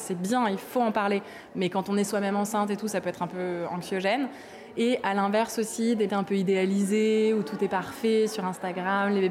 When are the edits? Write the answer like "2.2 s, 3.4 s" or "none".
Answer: 6.1 s